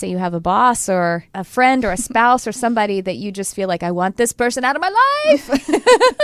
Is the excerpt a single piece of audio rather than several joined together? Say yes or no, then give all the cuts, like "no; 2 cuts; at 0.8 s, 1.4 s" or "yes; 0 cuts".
no; 1 cut; at 1.3 s